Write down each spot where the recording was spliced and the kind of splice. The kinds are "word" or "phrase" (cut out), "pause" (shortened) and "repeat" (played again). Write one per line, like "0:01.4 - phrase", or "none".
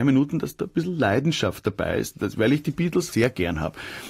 0:03.1 - word